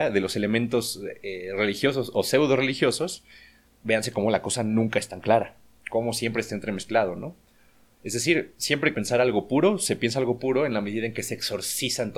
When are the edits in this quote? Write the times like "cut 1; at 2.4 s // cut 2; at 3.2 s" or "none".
cut 1; at 8.9 s